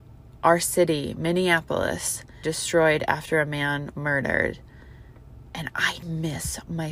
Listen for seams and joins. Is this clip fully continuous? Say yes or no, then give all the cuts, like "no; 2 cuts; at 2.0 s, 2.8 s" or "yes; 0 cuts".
no; 3 cuts; at 2.4 s, 3.9 s, 6.0 s